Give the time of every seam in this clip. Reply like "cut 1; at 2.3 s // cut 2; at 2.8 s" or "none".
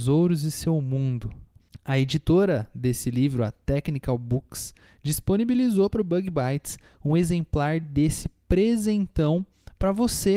none

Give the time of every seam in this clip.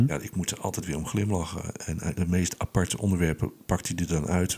cut 1; at 2.1 s

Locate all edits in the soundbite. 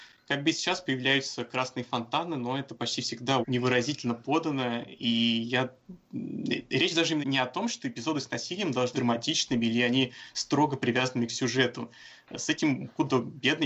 cut 1; at 3.4 s // cut 2; at 7.2 s // cut 3; at 8.9 s

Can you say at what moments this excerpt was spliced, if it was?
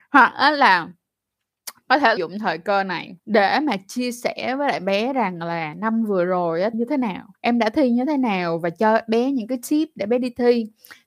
cut 1; at 2.2 s // cut 2; at 3.2 s // cut 3; at 6.7 s // cut 4; at 7.3 s

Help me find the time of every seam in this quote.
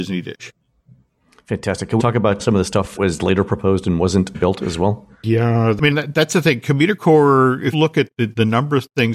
cut 1; at 2.0 s // cut 2; at 2.4 s // cut 3; at 3.0 s // cut 4; at 4.3 s // cut 5; at 5.9 s // cut 6; at 7.7 s // cut 7; at 8.1 s

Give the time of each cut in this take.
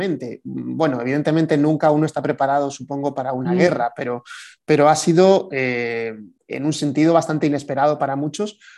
cut 1; at 6.4 s

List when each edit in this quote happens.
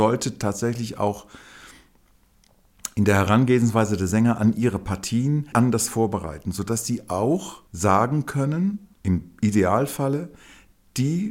cut 1; at 5.5 s // cut 2; at 7.7 s // cut 3; at 8.9 s

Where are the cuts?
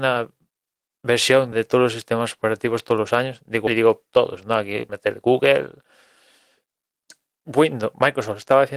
cut 1; at 1.5 s // cut 2; at 3.7 s // cut 3; at 4.9 s

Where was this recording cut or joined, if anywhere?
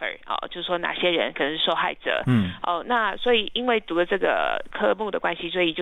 none

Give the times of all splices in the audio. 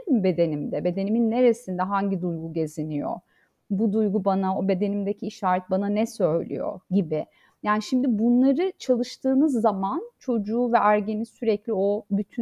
none

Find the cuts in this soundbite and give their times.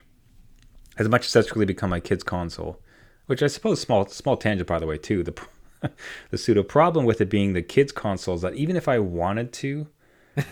none

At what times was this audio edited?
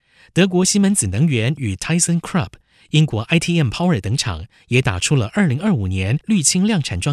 none

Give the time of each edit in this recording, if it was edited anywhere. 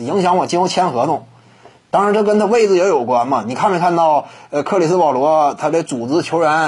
none

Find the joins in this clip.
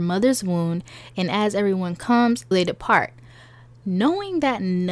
cut 1; at 2.5 s

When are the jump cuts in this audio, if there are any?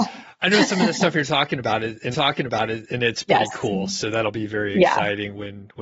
cut 1; at 2.1 s

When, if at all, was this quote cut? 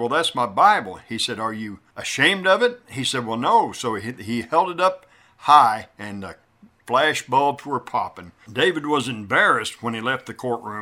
none

